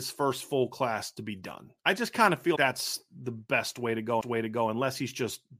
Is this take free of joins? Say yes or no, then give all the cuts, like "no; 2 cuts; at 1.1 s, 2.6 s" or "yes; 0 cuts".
no; 3 cuts; at 1.8 s, 2.6 s, 4.2 s